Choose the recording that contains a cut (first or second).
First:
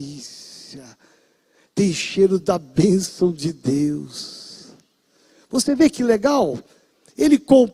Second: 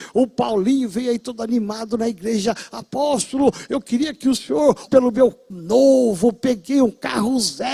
second